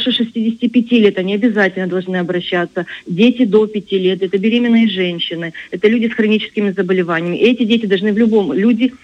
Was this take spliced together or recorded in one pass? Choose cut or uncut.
uncut